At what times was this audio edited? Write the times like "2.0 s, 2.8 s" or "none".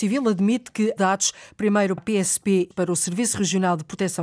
1.0 s, 2.0 s, 2.7 s

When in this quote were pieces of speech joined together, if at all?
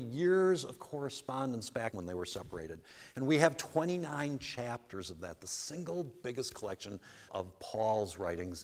1.9 s, 7.3 s

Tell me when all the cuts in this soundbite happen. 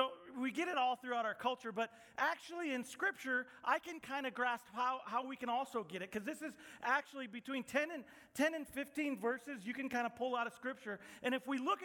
none

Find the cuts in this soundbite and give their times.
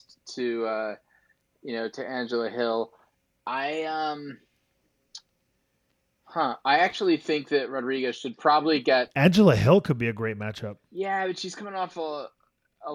10.8 s

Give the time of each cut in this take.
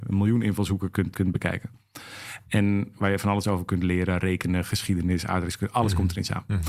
1.1 s

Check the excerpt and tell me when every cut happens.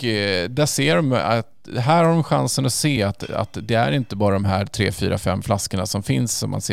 none

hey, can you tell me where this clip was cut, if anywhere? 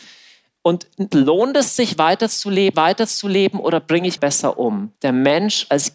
1.1 s, 2.7 s, 4.2 s, 5.0 s

